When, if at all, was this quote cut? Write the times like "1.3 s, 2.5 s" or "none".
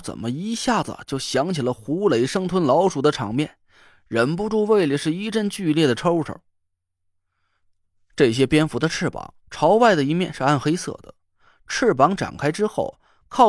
none